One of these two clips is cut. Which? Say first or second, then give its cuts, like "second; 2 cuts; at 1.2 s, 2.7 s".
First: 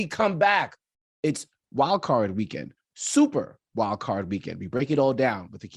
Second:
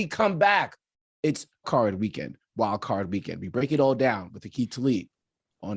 second; 2 cuts; at 1.6 s, 2.5 s